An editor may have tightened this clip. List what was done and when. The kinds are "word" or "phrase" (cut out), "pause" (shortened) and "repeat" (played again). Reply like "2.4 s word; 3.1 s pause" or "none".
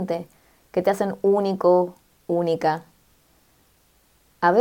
none